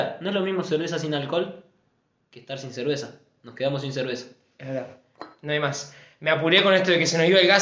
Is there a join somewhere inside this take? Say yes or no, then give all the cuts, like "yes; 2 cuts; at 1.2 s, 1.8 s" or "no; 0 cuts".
no; 0 cuts